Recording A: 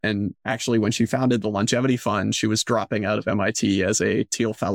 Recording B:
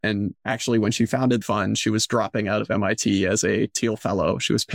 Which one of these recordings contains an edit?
B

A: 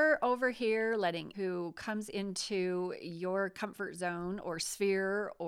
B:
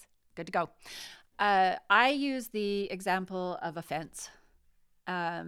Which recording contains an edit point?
A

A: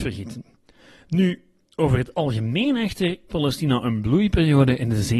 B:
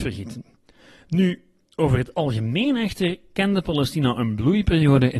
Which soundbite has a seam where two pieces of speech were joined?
A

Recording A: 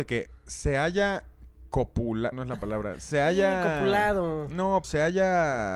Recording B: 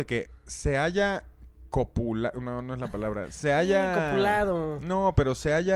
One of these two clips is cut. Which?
A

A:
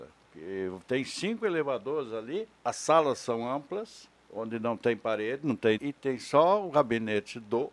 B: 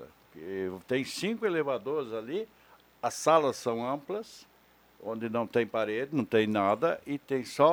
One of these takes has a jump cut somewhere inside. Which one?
A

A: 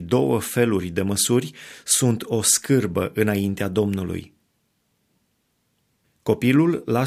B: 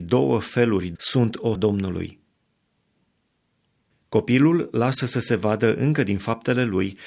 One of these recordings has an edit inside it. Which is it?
B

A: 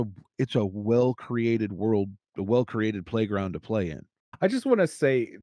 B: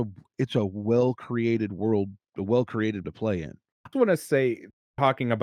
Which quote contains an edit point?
B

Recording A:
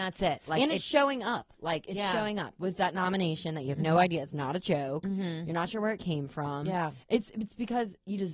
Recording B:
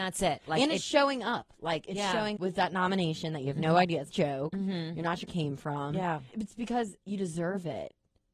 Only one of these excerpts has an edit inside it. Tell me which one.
B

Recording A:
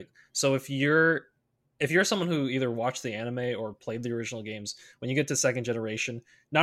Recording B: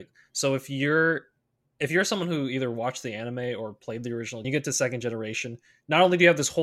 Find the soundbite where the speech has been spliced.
B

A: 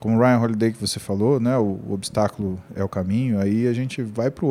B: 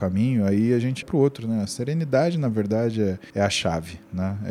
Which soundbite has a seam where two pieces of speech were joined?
B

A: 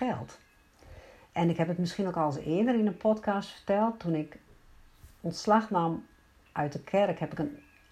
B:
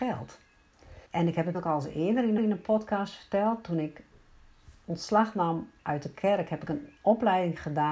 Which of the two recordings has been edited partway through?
B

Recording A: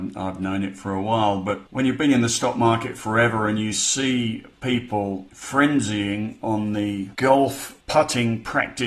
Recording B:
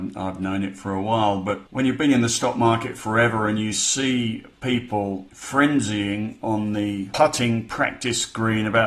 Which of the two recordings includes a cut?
B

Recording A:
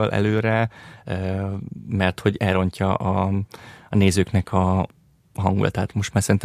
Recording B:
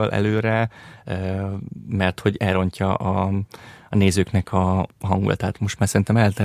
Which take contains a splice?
B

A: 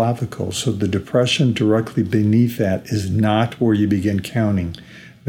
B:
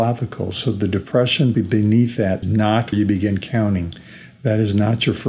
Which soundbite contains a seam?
B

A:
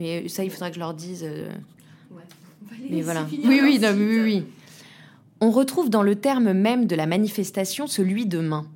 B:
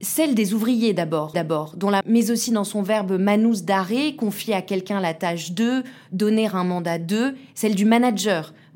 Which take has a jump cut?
B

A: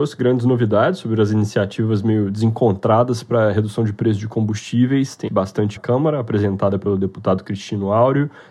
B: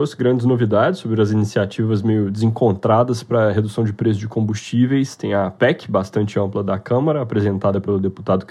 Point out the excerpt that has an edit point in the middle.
A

